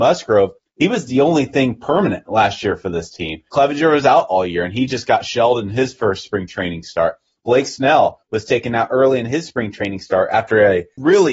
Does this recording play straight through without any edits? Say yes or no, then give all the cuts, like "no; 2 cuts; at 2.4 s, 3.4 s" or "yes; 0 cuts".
yes; 0 cuts